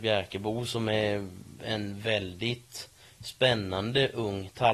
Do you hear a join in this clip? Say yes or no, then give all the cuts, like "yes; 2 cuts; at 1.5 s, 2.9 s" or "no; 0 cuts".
no; 0 cuts